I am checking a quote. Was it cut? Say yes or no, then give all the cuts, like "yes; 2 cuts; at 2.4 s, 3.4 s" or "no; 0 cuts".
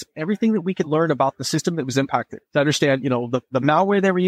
yes; 1 cut; at 2.5 s